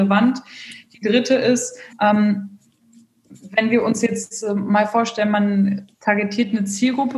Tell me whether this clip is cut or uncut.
cut